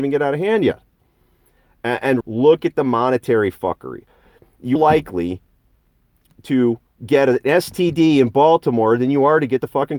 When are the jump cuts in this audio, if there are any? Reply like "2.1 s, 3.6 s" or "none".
2.2 s, 4.8 s